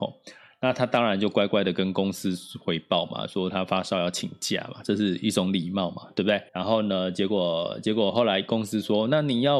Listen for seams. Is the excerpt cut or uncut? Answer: cut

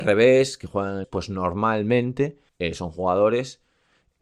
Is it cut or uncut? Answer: cut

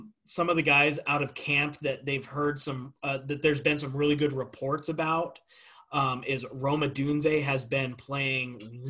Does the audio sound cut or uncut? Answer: uncut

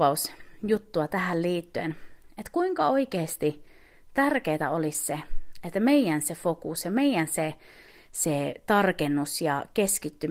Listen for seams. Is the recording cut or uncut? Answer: uncut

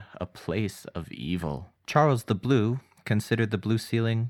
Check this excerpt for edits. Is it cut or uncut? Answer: cut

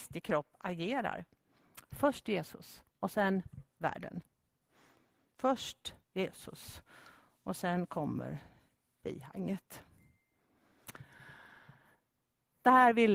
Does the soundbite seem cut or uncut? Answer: cut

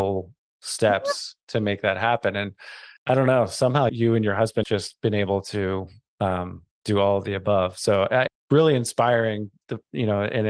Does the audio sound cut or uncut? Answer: cut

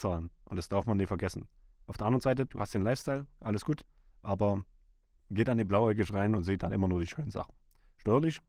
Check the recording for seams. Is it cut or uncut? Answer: uncut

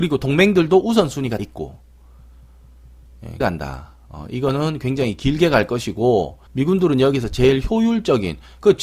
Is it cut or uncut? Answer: cut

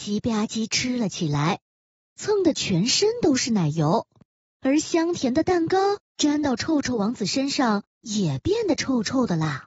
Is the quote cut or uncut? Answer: uncut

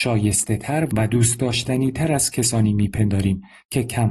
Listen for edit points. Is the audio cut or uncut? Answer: uncut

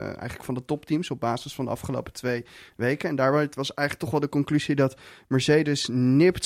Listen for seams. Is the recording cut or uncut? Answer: uncut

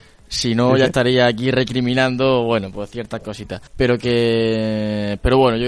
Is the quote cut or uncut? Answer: cut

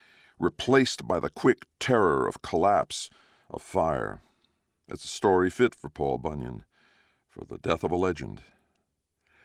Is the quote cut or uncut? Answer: uncut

